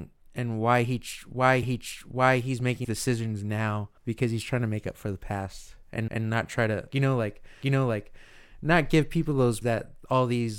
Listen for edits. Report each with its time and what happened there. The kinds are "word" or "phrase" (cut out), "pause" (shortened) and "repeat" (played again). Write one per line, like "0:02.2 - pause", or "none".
0:01.6 - repeat
0:02.8 - word
0:04.0 - pause
0:06.1 - repeat
0:06.9 - word
0:07.6 - repeat
0:09.6 - word